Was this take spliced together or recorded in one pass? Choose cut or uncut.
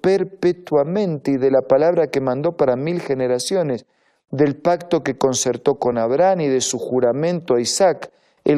uncut